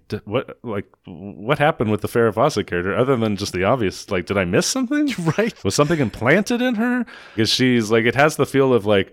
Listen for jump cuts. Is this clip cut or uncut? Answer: cut